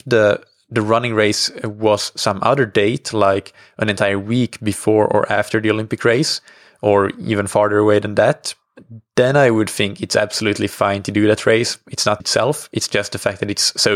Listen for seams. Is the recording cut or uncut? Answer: cut